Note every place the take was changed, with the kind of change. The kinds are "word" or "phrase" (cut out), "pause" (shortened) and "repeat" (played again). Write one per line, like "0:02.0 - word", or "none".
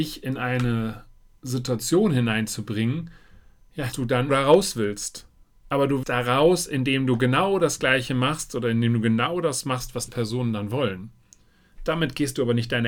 0:03.9 - word
0:04.3 - word
0:06.0 - word
0:10.1 - word